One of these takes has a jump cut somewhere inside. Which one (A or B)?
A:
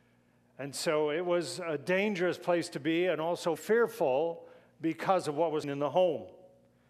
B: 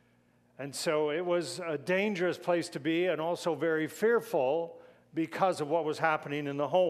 A